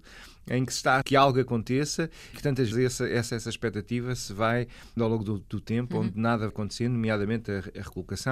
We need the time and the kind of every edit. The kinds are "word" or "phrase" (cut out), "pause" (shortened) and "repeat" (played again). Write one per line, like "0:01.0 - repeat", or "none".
0:01.0 - word
0:02.3 - word
0:02.7 - word
0:03.3 - word
0:05.0 - word
0:06.5 - word